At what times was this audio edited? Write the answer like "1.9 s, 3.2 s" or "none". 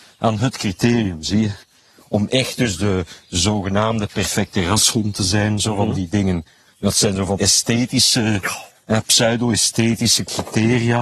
7.4 s